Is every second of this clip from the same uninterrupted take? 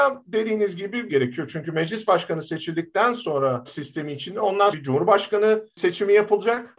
no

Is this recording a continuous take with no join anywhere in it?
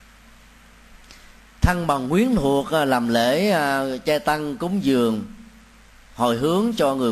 yes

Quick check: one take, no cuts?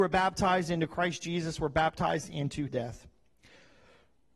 no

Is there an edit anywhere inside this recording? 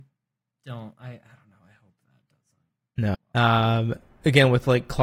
yes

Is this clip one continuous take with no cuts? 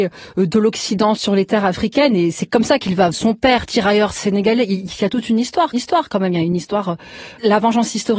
no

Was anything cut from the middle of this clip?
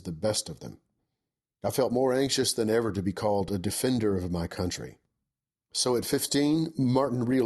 no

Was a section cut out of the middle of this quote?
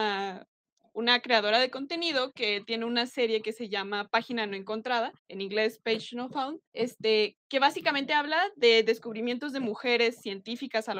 yes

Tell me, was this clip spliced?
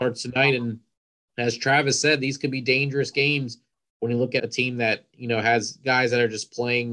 yes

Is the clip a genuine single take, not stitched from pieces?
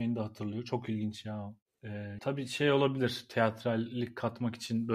no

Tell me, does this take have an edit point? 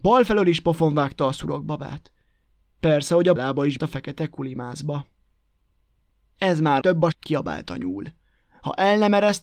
yes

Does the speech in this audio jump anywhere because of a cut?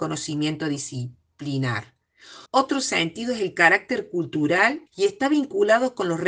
yes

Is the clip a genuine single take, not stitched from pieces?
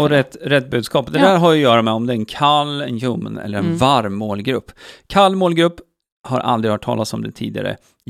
yes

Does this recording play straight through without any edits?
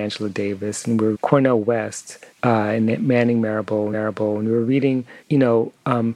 no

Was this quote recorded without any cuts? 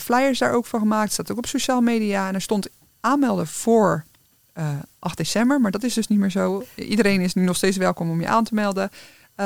yes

